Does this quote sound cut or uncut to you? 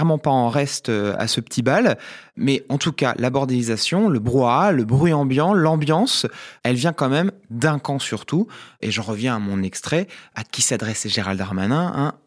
uncut